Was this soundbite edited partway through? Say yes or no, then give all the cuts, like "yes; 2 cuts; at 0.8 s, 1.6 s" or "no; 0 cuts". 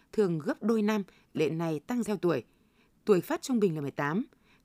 yes; 3 cuts; at 1.3 s, 2.0 s, 3.2 s